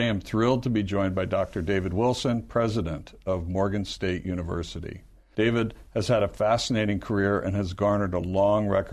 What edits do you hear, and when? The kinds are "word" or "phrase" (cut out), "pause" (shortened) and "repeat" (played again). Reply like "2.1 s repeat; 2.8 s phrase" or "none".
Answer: none